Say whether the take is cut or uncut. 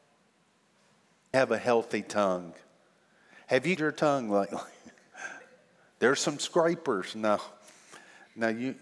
cut